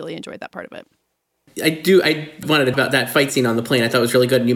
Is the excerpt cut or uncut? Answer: cut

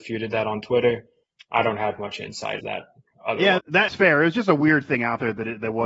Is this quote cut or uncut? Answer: cut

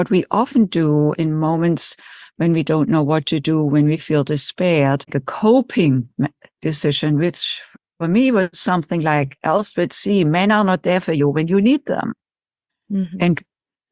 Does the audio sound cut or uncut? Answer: cut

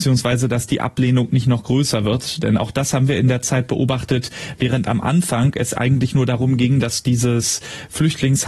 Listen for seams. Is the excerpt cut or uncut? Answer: uncut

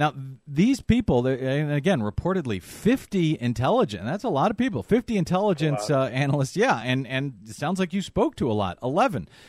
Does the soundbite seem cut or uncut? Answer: uncut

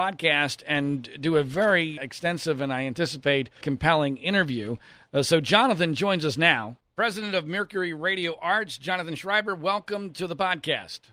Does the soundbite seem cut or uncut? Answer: cut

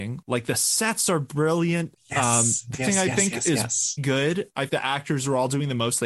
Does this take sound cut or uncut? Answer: cut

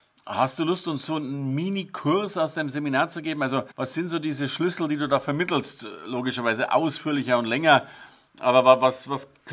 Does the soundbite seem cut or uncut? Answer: cut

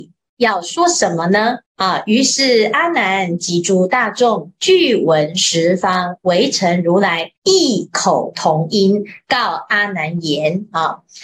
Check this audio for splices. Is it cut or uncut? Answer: cut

